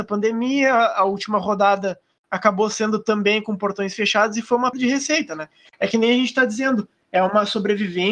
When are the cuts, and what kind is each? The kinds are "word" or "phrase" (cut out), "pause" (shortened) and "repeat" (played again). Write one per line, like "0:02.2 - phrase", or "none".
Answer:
0:04.7 - word

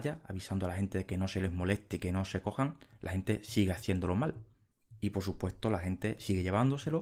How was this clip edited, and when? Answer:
none

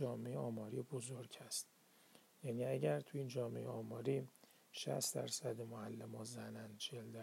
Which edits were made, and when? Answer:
none

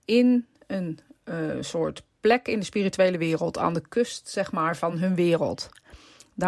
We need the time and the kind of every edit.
none

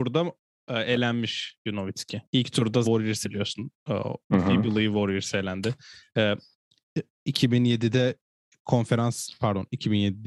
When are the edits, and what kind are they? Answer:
0:02.3 - pause
0:02.8 - word
0:03.2 - word

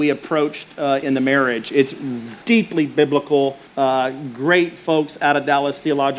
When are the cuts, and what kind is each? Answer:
0:01.0 - word
0:02.4 - pause
0:03.7 - pause

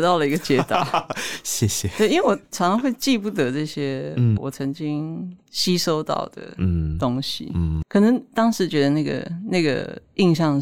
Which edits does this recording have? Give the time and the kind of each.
0:04.4 - word
0:07.8 - word

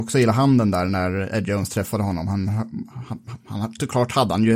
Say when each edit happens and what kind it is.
none

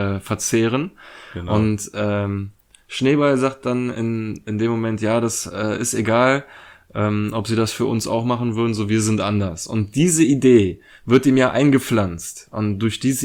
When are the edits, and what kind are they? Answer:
none

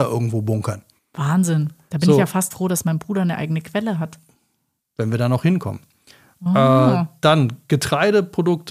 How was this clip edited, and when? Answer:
0:01.0 - pause
0:02.5 - word

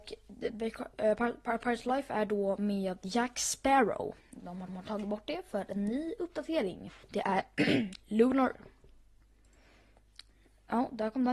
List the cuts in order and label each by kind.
0:04.2 - pause
0:04.7 - repeat
0:07.0 - pause
0:08.5 - phrase

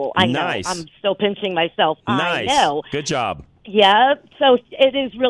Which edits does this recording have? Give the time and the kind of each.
none

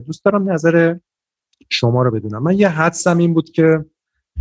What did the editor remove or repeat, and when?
none

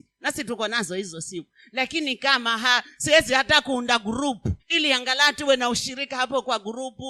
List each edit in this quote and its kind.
0:04.6 - pause

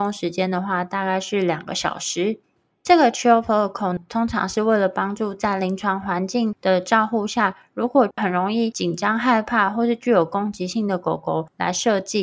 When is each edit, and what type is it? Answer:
none

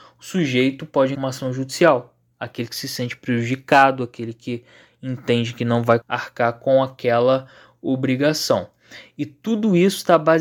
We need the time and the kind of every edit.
0:01.1 - phrase
0:06.0 - word

